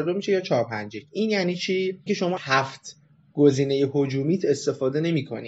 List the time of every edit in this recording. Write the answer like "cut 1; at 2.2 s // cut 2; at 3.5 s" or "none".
cut 1; at 2.1 s // cut 2; at 2.4 s